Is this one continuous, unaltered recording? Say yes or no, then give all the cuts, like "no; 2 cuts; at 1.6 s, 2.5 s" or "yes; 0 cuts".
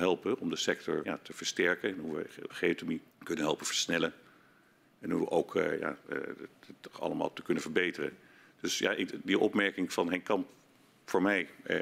no; 3 cuts; at 1.0 s, 2.5 s, 3.1 s